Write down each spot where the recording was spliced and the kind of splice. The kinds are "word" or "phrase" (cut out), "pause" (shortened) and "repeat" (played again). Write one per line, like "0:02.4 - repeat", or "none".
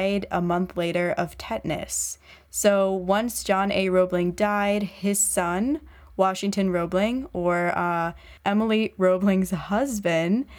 none